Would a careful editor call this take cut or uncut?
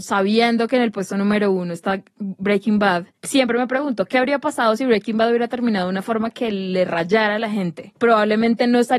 uncut